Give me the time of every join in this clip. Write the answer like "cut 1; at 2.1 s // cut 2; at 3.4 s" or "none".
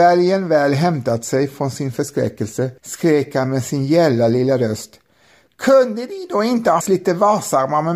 cut 1; at 1.9 s // cut 2; at 2.8 s // cut 3; at 6.8 s